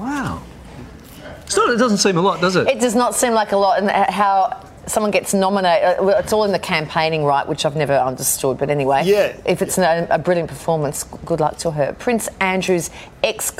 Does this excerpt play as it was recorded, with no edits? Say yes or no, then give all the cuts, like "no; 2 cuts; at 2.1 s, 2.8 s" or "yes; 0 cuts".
no; 1 cut; at 4.8 s